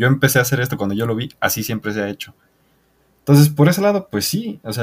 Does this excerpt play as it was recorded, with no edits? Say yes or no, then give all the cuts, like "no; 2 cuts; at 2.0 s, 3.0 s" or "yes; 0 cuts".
yes; 0 cuts